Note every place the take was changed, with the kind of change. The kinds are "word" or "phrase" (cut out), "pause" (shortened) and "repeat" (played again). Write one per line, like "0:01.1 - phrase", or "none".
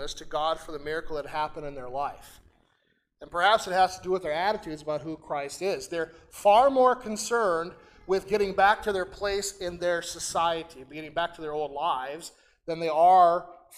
none